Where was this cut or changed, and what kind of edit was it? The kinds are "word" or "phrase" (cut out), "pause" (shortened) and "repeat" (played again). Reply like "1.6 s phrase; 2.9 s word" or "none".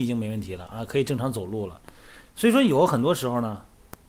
2.3 s pause